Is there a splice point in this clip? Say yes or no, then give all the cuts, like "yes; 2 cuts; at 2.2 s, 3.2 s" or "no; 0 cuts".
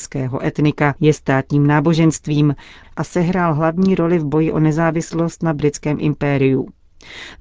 no; 0 cuts